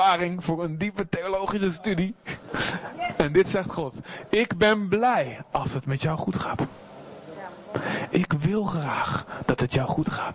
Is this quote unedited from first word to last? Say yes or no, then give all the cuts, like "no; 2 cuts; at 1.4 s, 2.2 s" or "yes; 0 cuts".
yes; 0 cuts